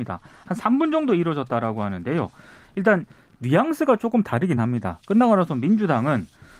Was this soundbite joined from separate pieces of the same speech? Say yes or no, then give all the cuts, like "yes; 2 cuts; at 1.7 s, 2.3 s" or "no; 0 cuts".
no; 0 cuts